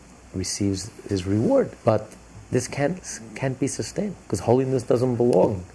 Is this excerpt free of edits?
no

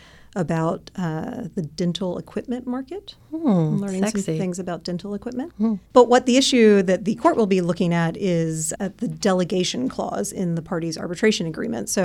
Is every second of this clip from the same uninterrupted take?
no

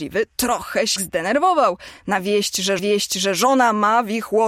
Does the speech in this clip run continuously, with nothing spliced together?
no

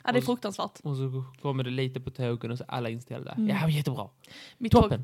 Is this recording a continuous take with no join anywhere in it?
yes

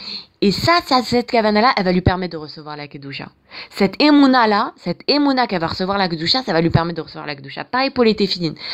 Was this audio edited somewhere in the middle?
no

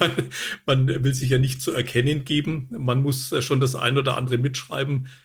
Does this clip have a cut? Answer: no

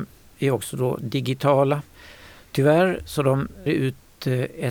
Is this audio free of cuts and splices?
no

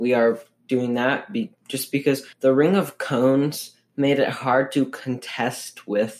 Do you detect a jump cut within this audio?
yes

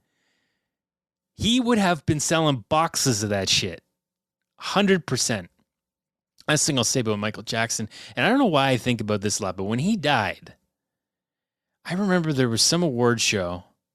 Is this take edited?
no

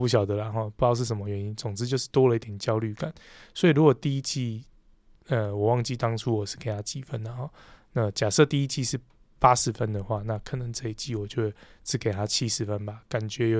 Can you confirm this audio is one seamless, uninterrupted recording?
yes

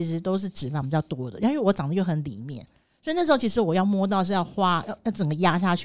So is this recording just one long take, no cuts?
yes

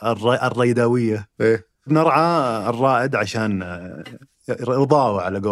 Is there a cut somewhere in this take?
yes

